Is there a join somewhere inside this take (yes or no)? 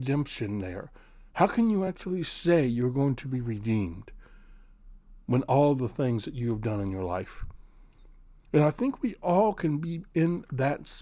no